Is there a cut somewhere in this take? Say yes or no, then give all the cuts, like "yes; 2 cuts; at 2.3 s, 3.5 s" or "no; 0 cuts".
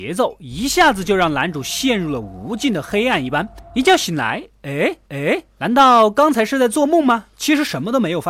yes; 1 cut; at 5.1 s